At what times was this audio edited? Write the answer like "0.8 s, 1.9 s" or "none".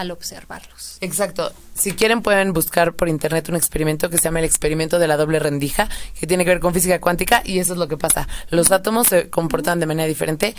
none

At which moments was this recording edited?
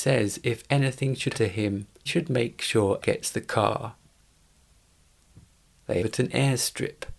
1.3 s, 2.1 s, 3.0 s, 6.0 s

